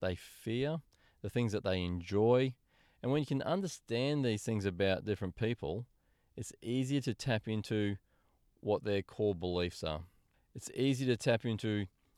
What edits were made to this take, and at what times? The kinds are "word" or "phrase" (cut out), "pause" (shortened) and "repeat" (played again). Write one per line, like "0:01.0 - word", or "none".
none